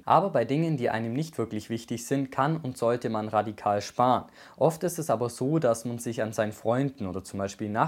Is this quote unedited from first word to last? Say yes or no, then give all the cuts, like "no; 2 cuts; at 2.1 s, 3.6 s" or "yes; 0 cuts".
yes; 0 cuts